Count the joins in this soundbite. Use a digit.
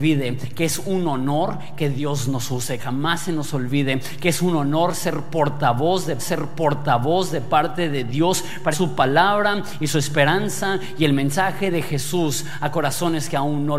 3